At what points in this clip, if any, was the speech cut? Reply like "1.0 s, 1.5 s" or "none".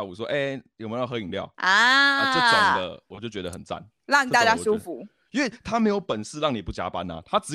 none